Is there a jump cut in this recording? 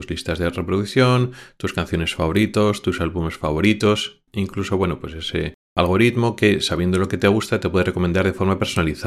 yes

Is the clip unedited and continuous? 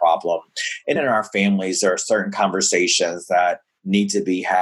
no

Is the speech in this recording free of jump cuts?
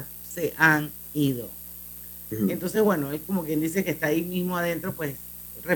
yes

